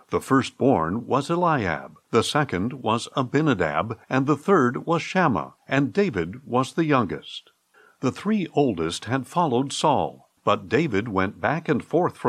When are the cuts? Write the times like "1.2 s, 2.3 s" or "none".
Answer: 2.0 s, 4.0 s, 5.6 s, 7.7 s, 10.4 s